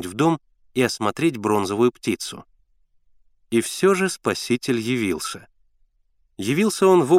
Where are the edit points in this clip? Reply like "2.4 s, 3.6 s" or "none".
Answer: none